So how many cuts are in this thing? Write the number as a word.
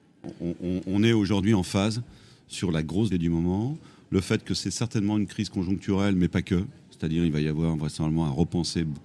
one